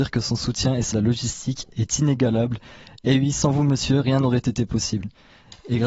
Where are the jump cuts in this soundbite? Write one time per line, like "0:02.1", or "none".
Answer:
0:00.9